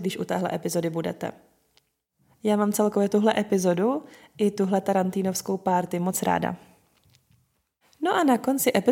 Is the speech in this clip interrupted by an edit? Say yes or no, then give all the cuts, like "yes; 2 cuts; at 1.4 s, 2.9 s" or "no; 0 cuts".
no; 0 cuts